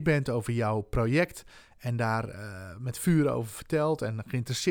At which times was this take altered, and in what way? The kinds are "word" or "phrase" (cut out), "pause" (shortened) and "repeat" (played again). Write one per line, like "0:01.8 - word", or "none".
none